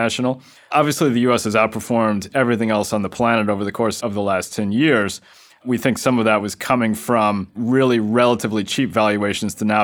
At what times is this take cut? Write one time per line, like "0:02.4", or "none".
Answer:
none